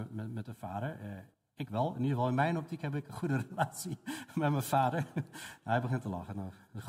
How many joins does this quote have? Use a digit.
1